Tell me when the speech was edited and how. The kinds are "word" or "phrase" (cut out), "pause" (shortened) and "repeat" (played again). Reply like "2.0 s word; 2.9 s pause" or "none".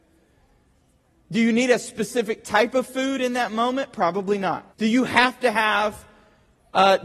4.7 s pause